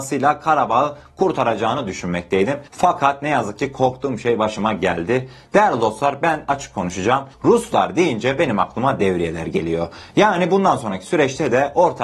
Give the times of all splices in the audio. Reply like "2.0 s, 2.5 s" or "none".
2.7 s, 7.3 s